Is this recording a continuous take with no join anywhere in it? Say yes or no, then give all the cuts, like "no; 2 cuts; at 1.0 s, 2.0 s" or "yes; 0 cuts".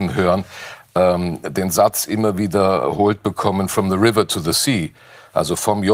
yes; 0 cuts